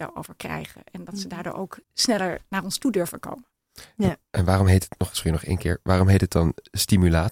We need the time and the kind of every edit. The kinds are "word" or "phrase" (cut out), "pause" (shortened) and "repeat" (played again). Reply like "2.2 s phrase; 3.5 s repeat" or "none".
1.8 s pause